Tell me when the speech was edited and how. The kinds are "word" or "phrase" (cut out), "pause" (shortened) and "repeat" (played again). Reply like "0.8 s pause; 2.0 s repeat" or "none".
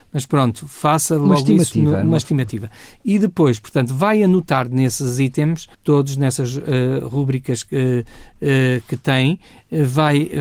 5.7 s pause